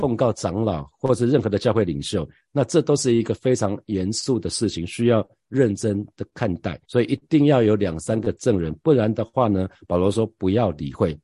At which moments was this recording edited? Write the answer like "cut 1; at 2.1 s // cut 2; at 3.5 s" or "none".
cut 1; at 6.8 s